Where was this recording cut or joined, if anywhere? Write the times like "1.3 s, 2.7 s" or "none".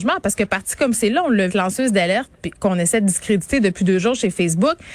1.5 s